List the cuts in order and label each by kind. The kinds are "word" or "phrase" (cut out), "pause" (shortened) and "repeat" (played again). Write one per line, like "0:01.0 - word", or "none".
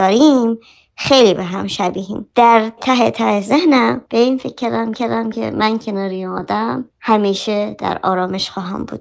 0:02.8 - word
0:04.9 - repeat